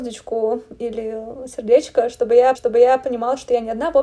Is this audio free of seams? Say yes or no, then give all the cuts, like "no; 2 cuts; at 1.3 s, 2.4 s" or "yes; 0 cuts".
no; 1 cut; at 2.5 s